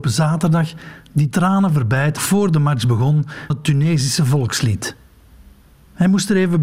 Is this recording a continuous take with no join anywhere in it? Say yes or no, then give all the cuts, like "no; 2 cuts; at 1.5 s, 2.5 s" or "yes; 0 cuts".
no; 3 cuts; at 1.3 s, 2.2 s, 3.5 s